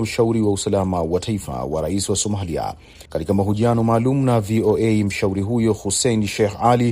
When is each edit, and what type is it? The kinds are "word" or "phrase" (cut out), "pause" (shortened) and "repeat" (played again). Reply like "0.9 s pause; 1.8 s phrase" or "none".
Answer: 3.1 s pause